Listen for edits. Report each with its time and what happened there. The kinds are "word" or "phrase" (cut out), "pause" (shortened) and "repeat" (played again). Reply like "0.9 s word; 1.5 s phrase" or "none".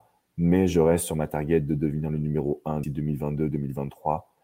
2.8 s word

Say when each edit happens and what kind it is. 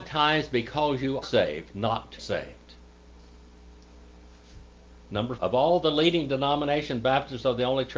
1.2 s word; 2.2 s word; 5.4 s word

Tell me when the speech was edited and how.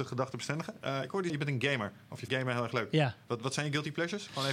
1.3 s word; 2.3 s word

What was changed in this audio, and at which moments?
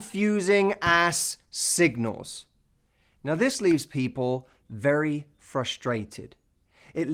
none

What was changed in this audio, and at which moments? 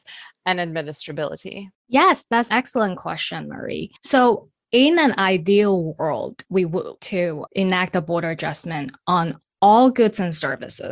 1.8 s pause; 2.5 s word; 4.0 s pause; 6.4 s word; 7.0 s word

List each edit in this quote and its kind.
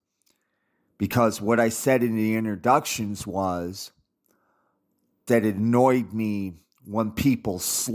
5.3 s word

